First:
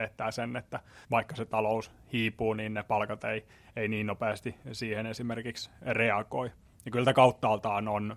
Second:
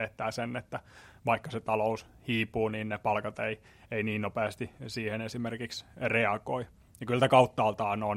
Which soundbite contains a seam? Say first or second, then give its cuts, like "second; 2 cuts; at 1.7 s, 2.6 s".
first; 1 cut; at 1.0 s